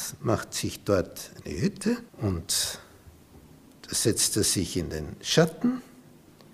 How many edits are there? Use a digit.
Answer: 1